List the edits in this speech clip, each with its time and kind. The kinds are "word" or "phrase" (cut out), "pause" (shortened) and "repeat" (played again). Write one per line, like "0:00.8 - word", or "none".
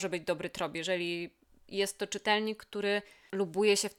none

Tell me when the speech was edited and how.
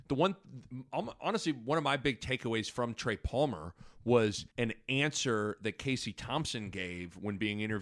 0:04.5 - pause

